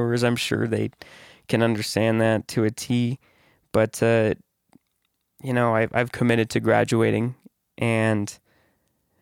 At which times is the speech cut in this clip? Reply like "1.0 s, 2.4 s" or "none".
none